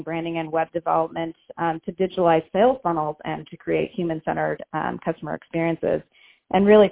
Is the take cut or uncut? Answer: uncut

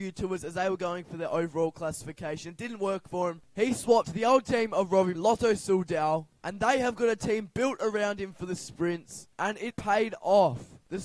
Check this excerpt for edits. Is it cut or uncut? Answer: cut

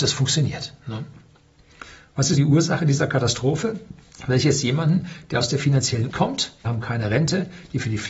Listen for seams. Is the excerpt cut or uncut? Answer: cut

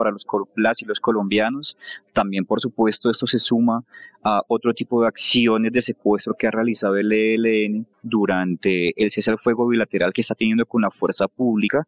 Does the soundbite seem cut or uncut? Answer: cut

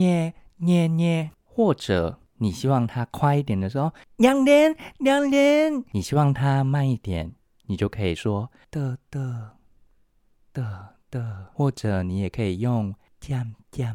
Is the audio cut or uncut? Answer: uncut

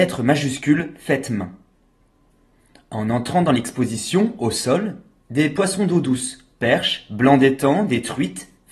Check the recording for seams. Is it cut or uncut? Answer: uncut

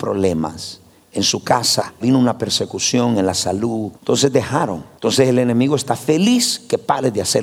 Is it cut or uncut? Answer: cut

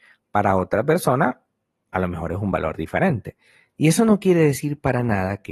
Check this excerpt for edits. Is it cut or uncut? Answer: uncut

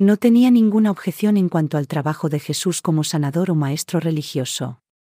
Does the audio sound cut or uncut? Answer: uncut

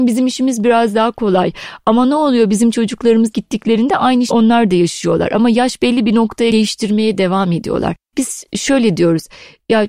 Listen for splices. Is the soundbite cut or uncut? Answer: cut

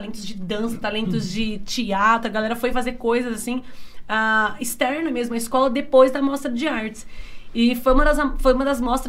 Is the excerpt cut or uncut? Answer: uncut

